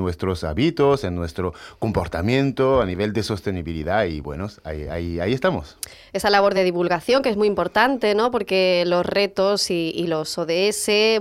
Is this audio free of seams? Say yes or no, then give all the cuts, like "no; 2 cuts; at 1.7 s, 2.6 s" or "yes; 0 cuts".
yes; 0 cuts